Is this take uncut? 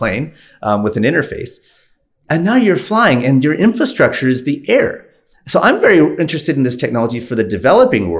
yes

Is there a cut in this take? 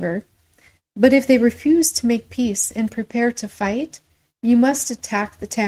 no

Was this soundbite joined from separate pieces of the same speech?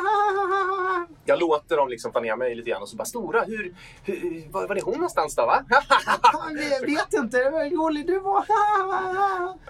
yes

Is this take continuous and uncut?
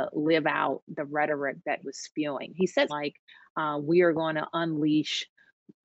no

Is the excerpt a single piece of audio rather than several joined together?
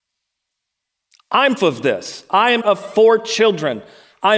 no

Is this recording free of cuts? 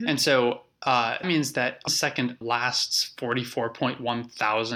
no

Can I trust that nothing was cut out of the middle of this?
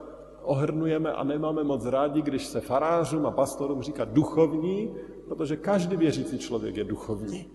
yes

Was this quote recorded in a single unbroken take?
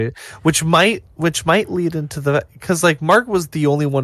yes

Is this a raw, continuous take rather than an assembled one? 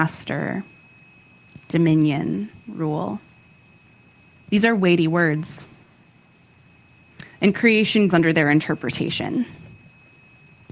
no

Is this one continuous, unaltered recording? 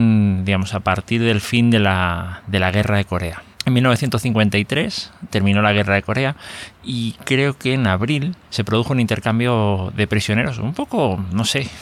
no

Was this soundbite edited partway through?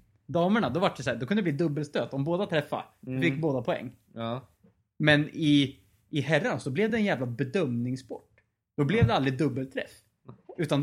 no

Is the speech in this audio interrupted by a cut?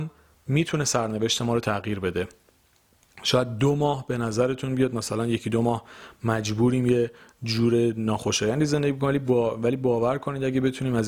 no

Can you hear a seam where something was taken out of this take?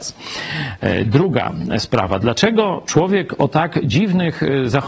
no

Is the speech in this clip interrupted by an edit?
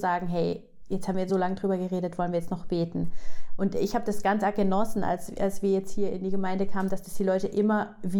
no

